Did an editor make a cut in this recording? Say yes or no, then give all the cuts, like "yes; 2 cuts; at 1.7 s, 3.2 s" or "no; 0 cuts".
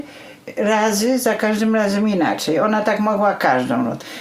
no; 0 cuts